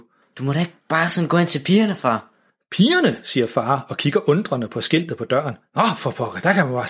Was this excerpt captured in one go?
yes; 0 cuts

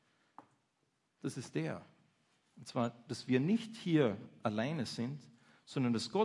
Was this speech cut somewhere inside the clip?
no; 0 cuts

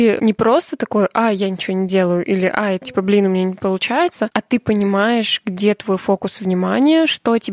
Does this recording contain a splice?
yes; 1 cut; at 2.8 s

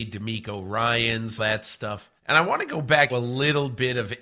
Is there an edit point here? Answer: yes; 3 cuts; at 1.4 s, 2.2 s, 3.1 s

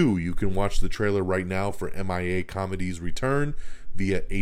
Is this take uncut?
yes; 0 cuts

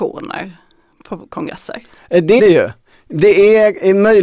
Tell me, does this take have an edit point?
yes; 1 cut; at 2.4 s

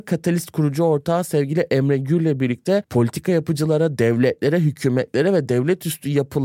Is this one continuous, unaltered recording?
yes; 0 cuts

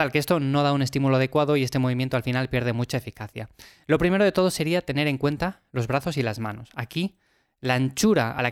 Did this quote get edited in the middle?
no; 0 cuts

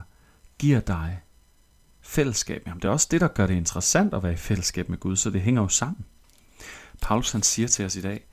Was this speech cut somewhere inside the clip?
no; 0 cuts

